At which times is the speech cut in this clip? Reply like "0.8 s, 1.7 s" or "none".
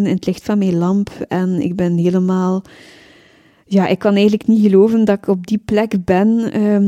none